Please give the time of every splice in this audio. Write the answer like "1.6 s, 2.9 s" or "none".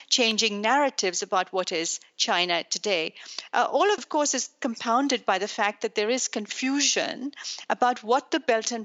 4.0 s